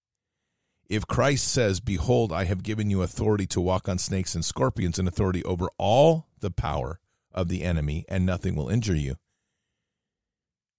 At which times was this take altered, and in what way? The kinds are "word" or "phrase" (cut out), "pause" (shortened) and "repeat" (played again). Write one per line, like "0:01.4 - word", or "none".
none